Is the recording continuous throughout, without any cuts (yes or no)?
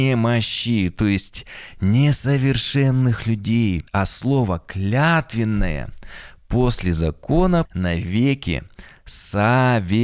no